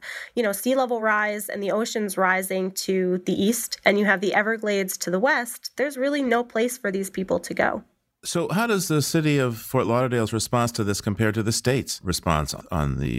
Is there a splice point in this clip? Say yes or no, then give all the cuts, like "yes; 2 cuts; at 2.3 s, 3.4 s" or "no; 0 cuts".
no; 0 cuts